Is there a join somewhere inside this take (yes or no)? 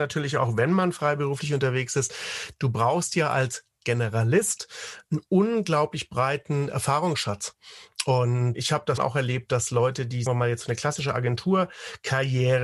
yes